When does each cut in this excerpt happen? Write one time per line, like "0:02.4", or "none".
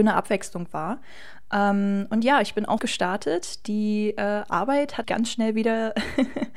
0:02.8
0:05.0